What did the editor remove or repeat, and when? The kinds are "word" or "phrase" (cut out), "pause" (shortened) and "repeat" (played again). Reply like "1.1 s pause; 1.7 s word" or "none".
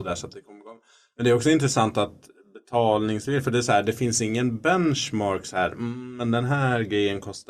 none